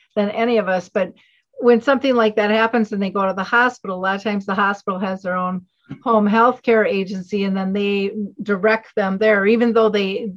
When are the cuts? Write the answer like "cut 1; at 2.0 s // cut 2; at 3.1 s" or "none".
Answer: none